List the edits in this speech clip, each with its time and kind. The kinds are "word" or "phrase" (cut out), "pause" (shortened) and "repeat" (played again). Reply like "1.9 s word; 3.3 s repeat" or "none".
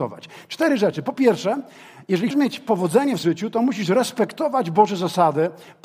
2.3 s word; 3.2 s word